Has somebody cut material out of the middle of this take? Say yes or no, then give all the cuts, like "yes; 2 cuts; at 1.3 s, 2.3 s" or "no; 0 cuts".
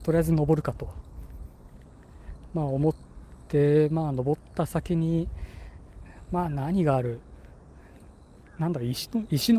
no; 0 cuts